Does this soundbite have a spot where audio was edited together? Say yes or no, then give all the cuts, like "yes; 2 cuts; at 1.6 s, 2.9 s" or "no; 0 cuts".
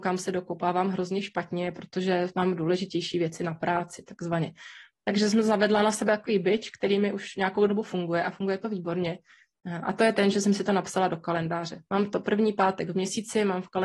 no; 0 cuts